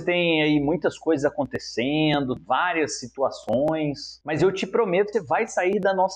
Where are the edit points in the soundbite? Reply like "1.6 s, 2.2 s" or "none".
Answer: 2.4 s, 5.1 s